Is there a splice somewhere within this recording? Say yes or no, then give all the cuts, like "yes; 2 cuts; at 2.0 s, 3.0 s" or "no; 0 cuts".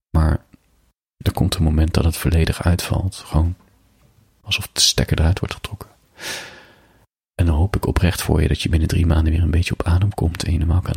no; 0 cuts